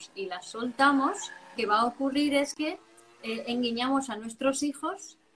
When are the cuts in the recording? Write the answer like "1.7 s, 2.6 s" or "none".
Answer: 1.6 s